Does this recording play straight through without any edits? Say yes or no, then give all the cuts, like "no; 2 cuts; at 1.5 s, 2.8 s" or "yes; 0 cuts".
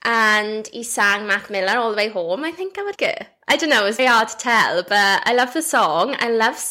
no; 2 cuts; at 2.9 s, 4.0 s